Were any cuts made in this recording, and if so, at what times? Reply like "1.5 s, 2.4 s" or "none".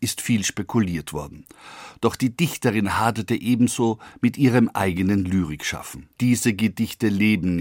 6.1 s